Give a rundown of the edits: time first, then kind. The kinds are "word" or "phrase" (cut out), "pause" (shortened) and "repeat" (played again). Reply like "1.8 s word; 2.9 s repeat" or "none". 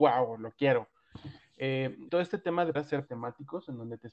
2.1 s word; 2.7 s word; 3.1 s word